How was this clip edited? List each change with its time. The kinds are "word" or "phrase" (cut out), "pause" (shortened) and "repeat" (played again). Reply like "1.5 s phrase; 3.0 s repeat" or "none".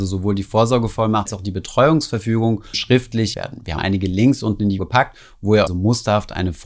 1.3 s word; 2.7 s word; 3.3 s word; 3.8 s phrase; 4.8 s word; 5.7 s phrase